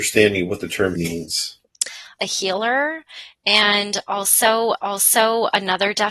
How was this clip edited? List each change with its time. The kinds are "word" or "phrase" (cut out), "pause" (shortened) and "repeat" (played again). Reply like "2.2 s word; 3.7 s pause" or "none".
1.0 s word; 2.2 s phrase; 4.8 s repeat